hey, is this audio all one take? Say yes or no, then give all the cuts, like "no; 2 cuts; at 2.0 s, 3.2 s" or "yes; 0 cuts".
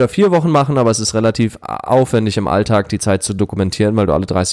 yes; 0 cuts